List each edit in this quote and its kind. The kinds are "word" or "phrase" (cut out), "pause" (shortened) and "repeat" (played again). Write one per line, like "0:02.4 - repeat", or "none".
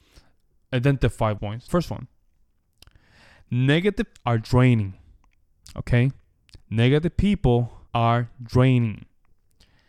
0:01.4 - phrase
0:01.7 - phrase
0:04.2 - word
0:06.6 - pause
0:07.9 - pause